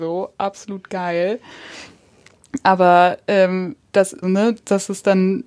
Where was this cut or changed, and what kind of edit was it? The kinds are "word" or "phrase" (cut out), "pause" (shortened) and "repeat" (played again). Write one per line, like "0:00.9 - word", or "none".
0:04.2 - word